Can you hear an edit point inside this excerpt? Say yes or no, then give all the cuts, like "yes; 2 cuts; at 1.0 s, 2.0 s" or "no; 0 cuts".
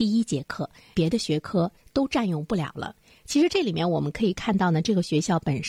no; 0 cuts